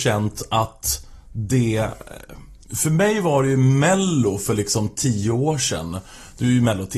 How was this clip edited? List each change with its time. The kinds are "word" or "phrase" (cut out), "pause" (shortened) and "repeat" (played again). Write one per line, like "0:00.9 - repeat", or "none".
0:02.6 - pause